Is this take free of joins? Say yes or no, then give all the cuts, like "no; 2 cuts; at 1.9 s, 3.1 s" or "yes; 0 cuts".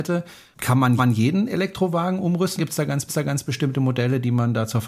no; 3 cuts; at 1.0 s, 2.6 s, 3.1 s